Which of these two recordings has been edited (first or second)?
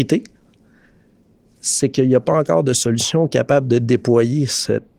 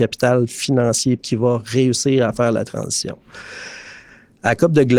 second